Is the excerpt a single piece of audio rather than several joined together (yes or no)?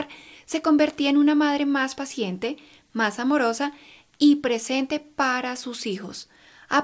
yes